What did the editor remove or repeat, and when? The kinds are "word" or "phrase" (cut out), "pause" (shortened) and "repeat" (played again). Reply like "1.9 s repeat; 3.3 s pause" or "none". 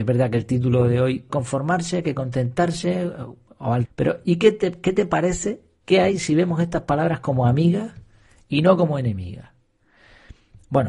1.3 s phrase; 3.8 s word